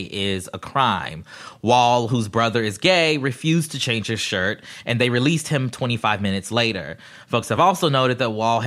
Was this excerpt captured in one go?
yes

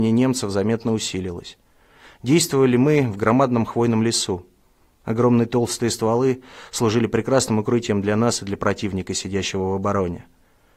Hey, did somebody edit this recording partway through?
no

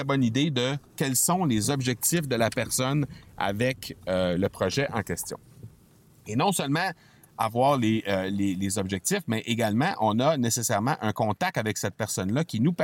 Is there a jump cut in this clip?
no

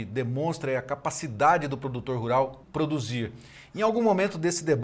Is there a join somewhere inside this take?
yes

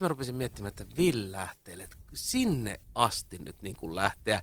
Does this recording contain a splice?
no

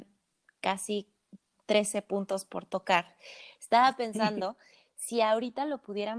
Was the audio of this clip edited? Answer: no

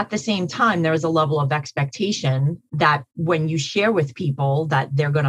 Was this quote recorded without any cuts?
no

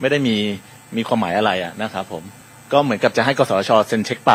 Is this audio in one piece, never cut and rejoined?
yes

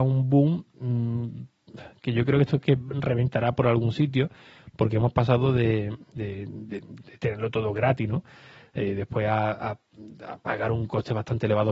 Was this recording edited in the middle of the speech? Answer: no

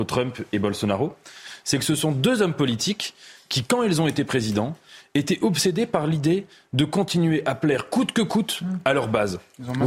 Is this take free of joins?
yes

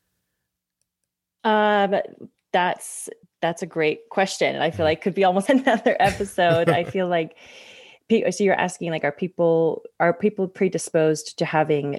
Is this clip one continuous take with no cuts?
no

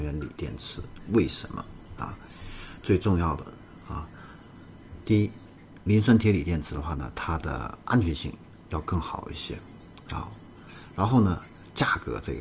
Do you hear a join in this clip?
no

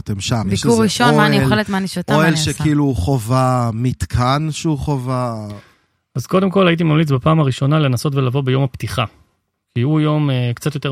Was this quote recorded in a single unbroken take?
yes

